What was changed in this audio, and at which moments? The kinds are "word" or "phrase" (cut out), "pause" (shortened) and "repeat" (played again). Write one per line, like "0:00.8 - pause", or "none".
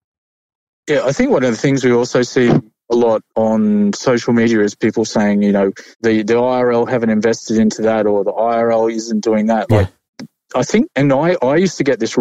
0:03.3 - pause
0:05.9 - pause
0:10.1 - pause
0:10.9 - pause